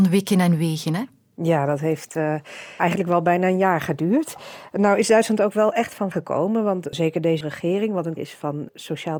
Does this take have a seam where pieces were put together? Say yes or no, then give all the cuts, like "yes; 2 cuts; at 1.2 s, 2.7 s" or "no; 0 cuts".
yes; 4 cuts; at 2.8 s, 6.1 s, 7.4 s, 8.2 s